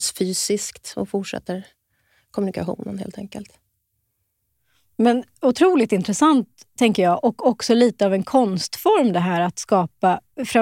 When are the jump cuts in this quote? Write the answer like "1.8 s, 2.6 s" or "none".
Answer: none